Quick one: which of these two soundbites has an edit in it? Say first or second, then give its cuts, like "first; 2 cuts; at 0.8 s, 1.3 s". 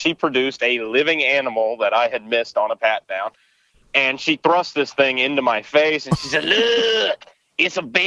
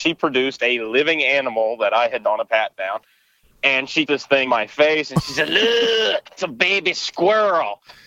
second; 4 cuts; at 2.2 s, 4.1 s, 4.5 s, 6.4 s